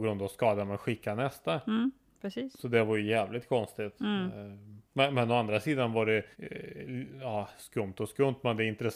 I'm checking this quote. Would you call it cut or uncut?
cut